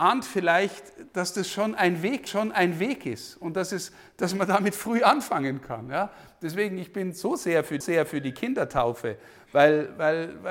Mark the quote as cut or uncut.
cut